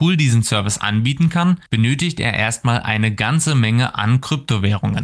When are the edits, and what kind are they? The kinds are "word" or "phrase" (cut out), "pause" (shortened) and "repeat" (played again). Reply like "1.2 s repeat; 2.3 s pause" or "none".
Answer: 1.7 s pause